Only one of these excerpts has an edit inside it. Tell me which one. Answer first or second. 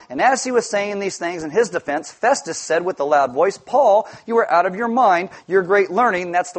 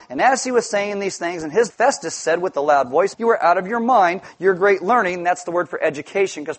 second